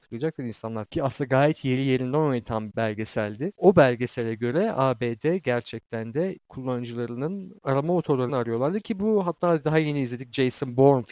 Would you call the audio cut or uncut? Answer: cut